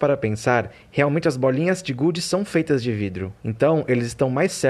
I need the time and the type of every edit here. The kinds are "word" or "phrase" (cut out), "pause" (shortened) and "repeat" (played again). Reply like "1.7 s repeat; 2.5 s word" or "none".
3.4 s pause